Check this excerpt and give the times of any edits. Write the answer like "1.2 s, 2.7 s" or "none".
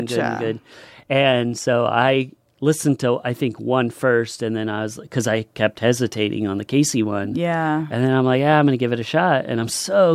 none